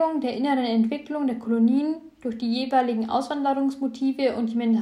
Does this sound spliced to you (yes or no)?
no